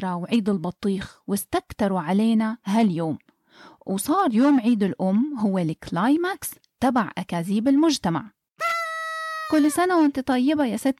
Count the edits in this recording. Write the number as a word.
zero